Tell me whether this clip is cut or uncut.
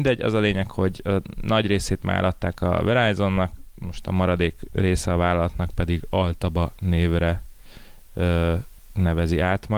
uncut